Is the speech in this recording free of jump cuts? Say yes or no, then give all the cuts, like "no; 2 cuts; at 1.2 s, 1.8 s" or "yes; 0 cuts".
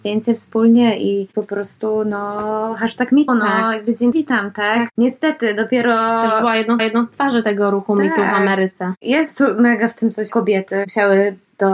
no; 4 cuts; at 3.3 s, 4.1 s, 6.8 s, 10.3 s